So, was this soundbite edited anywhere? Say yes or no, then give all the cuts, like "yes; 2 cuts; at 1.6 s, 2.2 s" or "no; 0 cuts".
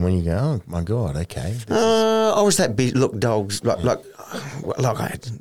no; 0 cuts